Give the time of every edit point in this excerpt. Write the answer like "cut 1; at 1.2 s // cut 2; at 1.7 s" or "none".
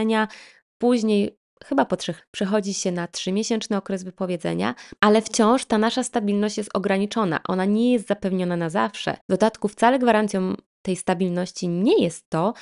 cut 1; at 2.2 s // cut 2; at 5.0 s // cut 3; at 9.2 s